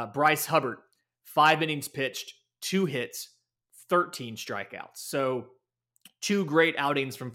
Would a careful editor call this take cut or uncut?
uncut